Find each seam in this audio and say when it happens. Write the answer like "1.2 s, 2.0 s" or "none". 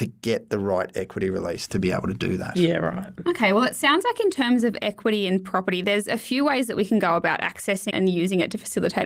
7.9 s